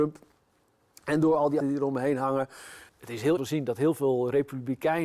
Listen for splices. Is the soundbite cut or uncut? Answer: cut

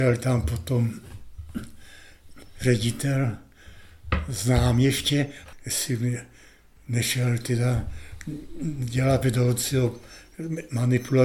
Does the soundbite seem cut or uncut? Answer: uncut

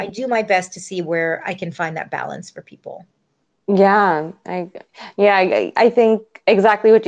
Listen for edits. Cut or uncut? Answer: uncut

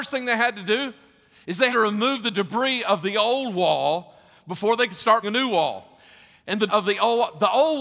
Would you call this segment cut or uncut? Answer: cut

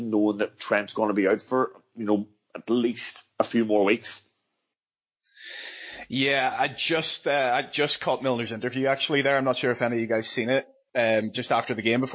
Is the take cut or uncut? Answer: uncut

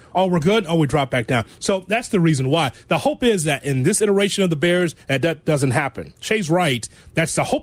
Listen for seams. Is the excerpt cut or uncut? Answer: uncut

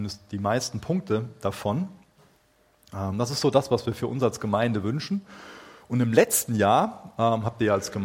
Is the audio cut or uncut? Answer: uncut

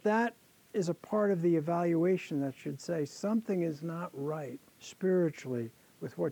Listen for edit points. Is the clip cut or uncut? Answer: cut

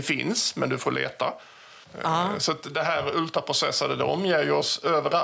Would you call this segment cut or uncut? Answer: cut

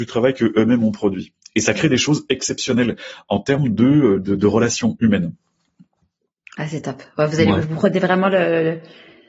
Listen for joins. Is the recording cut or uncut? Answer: uncut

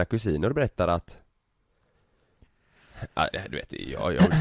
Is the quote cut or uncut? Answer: cut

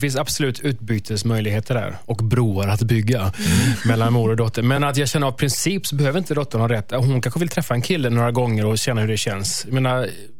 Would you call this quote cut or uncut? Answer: uncut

